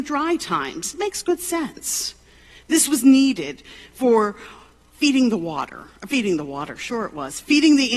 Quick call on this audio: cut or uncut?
uncut